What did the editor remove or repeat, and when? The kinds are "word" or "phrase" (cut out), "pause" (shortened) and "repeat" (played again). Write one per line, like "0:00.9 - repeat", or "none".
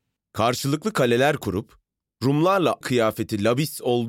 0:02.8 - word